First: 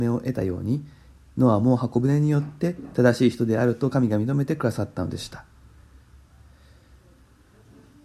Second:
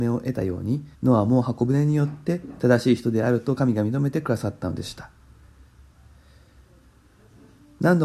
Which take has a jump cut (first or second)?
second